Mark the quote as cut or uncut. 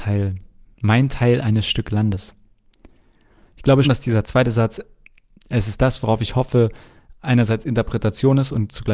cut